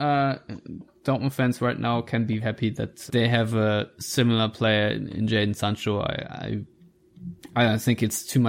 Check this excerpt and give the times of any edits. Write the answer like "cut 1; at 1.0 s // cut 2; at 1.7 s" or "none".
cut 1; at 2.4 s // cut 2; at 3.1 s